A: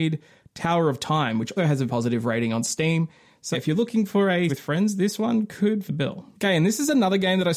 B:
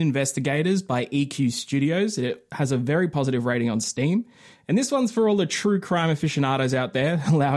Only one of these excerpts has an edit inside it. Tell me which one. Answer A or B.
A